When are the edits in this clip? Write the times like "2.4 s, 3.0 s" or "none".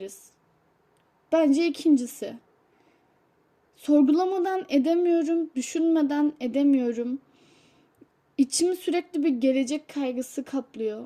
none

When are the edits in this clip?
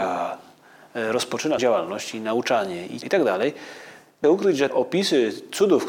1.6 s, 3.0 s, 4.2 s, 4.7 s

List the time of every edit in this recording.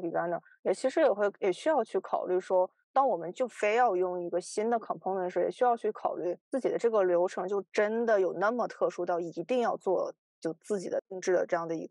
6.4 s

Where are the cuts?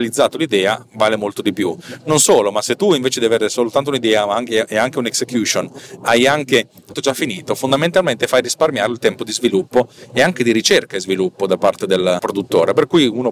6.9 s

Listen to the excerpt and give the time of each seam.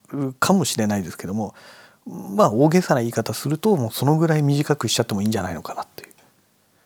none

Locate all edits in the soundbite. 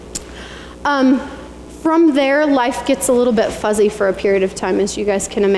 none

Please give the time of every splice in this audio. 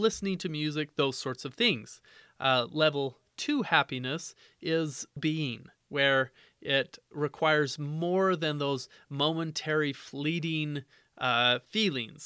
5.2 s

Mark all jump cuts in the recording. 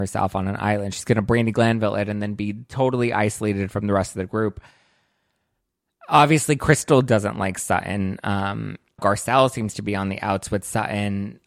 9.0 s

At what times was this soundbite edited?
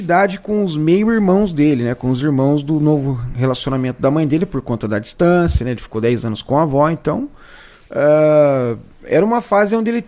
none

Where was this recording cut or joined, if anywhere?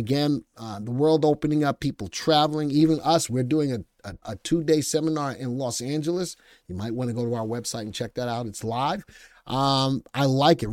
4.2 s

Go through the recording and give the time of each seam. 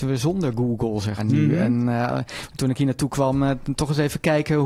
1.2 s

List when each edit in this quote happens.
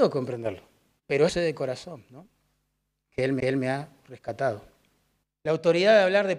1.3 s, 3.4 s, 5.2 s

